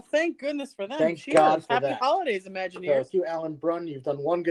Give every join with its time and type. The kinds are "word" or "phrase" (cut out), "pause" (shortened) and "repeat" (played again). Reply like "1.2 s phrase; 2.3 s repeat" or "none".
3.1 s word

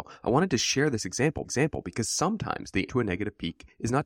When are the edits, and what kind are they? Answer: 1.4 s repeat; 2.9 s word

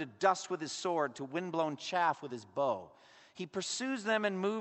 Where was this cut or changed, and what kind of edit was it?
none

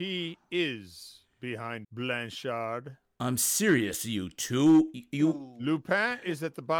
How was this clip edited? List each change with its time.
1.8 s word

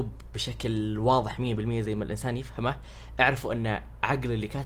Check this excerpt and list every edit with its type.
none

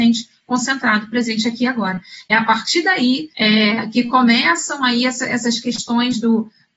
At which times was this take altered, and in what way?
3.3 s pause

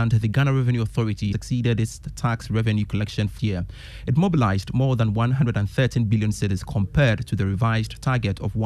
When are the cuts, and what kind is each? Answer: 1.3 s word; 3.4 s word

